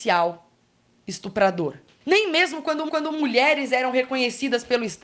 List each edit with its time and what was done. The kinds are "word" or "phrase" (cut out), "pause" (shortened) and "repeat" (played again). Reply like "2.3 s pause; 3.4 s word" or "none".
2.9 s repeat